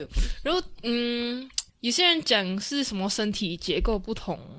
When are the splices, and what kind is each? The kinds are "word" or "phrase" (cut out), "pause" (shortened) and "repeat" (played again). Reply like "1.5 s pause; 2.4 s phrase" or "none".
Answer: 1.7 s pause